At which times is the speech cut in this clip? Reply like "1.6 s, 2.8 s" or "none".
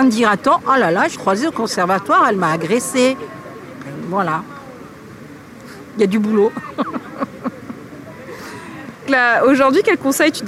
1.2 s, 9.1 s